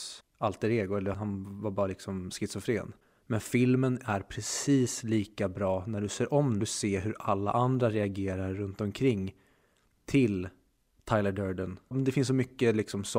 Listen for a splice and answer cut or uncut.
cut